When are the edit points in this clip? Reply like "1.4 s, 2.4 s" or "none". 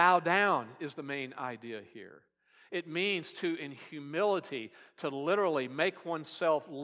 none